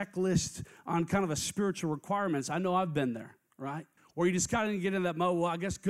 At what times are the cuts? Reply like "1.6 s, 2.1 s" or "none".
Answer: 4.0 s